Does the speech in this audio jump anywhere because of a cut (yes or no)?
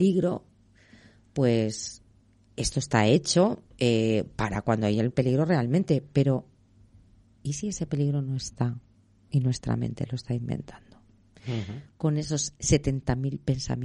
yes